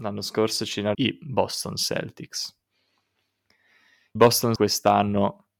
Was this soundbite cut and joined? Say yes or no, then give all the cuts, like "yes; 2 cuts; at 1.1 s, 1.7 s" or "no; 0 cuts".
yes; 3 cuts; at 0.9 s, 4.2 s, 4.6 s